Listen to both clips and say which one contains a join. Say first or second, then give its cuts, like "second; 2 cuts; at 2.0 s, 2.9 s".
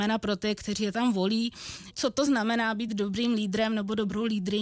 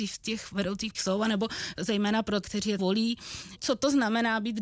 second; 3 cuts; at 0.9 s, 2.4 s, 2.8 s